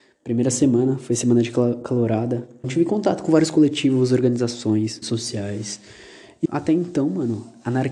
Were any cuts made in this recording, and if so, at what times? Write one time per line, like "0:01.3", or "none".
0:02.6
0:05.0
0:06.4